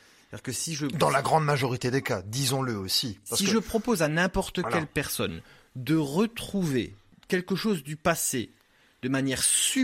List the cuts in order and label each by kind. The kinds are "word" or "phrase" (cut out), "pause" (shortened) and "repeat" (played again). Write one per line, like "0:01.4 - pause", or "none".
none